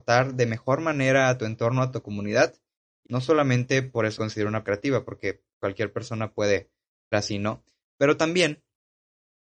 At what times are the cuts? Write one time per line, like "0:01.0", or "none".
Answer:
0:03.0
0:04.2
0:04.6
0:07.1

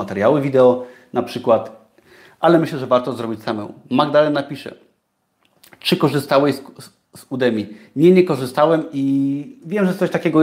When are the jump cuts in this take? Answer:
none

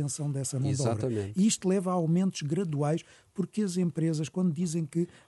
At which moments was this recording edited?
none

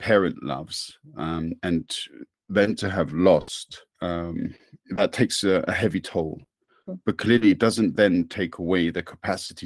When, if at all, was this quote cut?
0:03.9

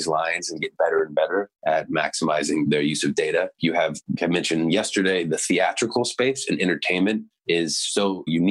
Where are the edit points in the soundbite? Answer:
0:03.5
0:04.2

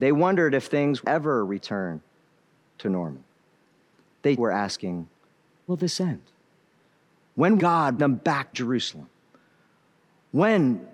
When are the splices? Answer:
0:01.0
0:04.4
0:05.7
0:07.6
0:08.0
0:08.5

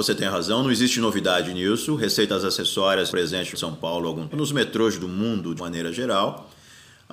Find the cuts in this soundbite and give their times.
0:03.1
0:03.5
0:04.3
0:05.6

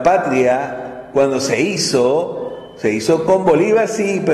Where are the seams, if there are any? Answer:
none

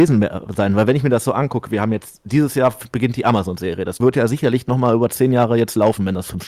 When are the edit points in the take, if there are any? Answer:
0:04.0

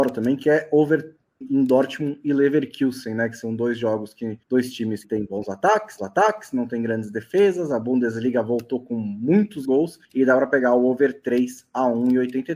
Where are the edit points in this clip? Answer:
0:01.4
0:04.4
0:05.0
0:06.0
0:09.6
0:10.0

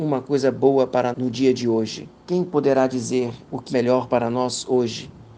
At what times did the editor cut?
0:01.1
0:02.2
0:03.7

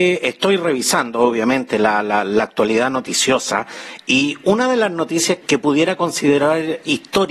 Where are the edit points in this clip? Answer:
0:05.4

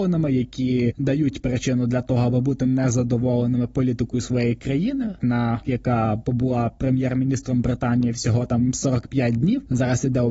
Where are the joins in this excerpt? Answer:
0:05.6

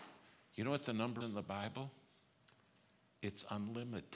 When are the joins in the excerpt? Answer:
0:01.2

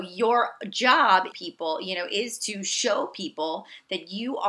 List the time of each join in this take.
0:01.3

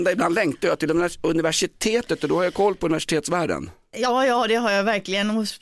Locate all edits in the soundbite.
none

